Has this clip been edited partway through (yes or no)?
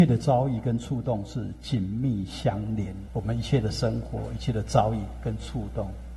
yes